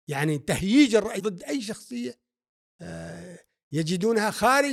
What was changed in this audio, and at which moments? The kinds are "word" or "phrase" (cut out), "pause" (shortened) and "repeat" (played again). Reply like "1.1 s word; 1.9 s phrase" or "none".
1.2 s word